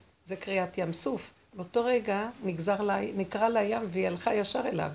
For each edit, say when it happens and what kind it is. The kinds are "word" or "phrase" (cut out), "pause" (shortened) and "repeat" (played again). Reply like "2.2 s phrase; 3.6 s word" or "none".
none